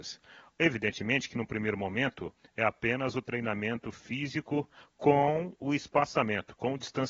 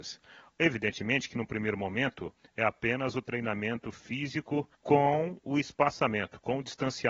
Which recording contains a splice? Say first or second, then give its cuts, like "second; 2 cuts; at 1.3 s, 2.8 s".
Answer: second; 1 cut; at 4.7 s